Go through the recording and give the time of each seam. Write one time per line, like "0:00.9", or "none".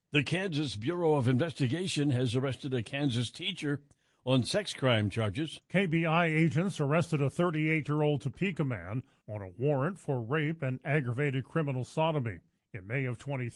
none